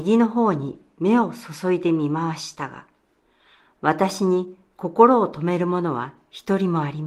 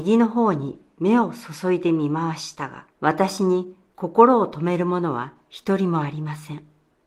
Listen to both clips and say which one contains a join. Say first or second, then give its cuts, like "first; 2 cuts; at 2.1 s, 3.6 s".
second; 1 cut; at 2.9 s